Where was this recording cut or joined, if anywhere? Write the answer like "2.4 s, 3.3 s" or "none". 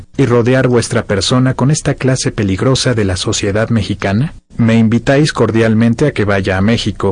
4.5 s